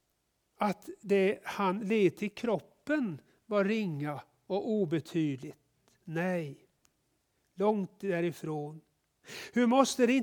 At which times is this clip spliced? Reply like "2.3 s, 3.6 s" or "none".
none